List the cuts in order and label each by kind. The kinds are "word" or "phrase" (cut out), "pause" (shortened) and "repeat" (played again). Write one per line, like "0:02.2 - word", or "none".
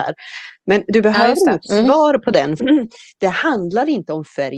0:02.6 - phrase